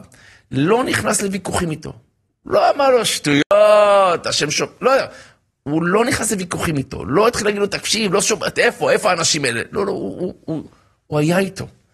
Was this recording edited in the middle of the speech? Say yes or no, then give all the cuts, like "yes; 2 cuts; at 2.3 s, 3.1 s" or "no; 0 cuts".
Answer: no; 0 cuts